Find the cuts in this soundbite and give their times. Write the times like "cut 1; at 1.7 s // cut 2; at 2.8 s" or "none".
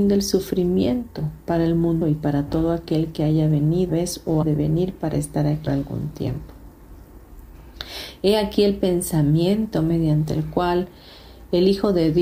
cut 1; at 2.0 s // cut 2; at 3.9 s // cut 3; at 4.4 s // cut 4; at 5.7 s

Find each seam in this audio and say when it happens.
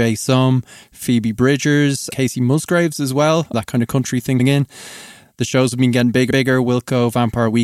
cut 1; at 2.1 s // cut 2; at 3.5 s // cut 3; at 4.4 s // cut 4; at 6.3 s

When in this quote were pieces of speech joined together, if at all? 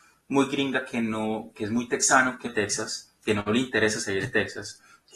cut 1; at 1.5 s // cut 2; at 2.5 s

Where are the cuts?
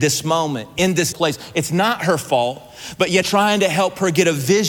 cut 1; at 1.1 s // cut 2; at 3.2 s

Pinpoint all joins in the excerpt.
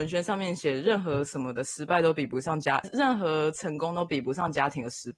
cut 1; at 2.8 s

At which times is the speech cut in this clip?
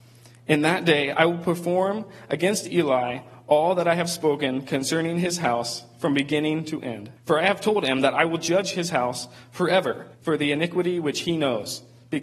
cut 1; at 7.2 s // cut 2; at 10.1 s

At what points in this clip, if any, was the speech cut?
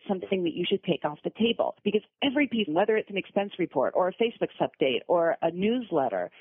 cut 1; at 1.8 s // cut 2; at 2.7 s // cut 3; at 4.5 s

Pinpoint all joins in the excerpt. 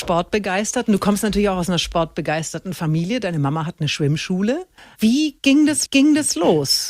cut 1; at 4.8 s // cut 2; at 5.9 s

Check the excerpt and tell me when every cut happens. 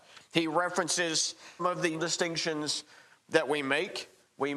cut 1; at 1.6 s // cut 2; at 2.0 s

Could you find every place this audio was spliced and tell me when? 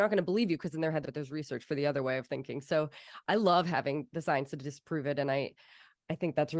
cut 1; at 1.0 s

